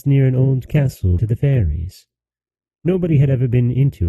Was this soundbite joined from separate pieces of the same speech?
yes; 1 cut; at 1.2 s

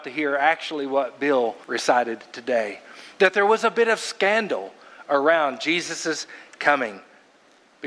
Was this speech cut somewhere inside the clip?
yes; 1 cut; at 1.6 s

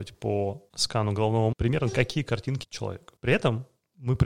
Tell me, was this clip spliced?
yes; 2 cuts; at 1.5 s, 2.6 s

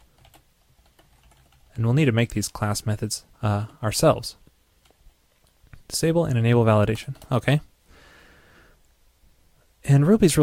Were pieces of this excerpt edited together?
yes; 2 cuts; at 3.3 s, 5.8 s

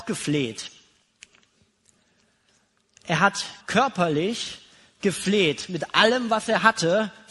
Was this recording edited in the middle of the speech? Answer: yes; 1 cut; at 3.6 s

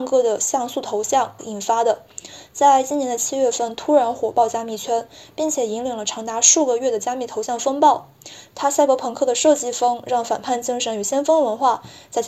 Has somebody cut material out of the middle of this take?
yes; 1 cut; at 1.4 s

